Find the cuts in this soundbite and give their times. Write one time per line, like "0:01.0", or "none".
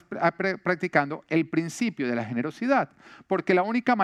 none

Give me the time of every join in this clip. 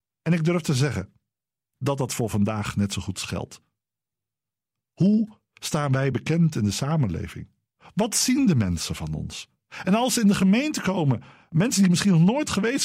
none

